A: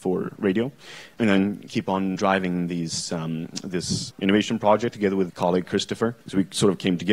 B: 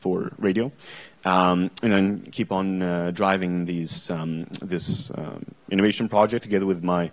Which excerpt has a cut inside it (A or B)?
A